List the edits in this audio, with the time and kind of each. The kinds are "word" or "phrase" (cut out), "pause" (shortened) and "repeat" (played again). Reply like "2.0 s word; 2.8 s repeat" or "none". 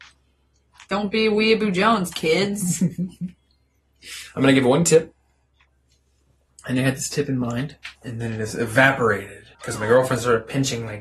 8.0 s pause; 9.5 s pause